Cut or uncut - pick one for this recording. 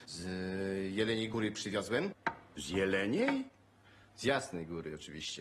uncut